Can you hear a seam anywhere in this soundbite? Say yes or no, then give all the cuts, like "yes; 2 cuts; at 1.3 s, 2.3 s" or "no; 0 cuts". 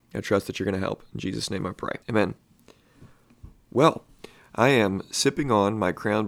yes; 1 cut; at 2.0 s